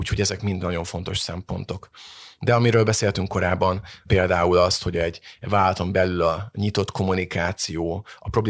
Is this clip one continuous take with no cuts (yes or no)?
yes